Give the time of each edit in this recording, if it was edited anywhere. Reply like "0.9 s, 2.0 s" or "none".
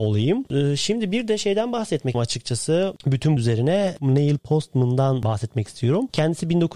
2.1 s, 3.4 s, 4.4 s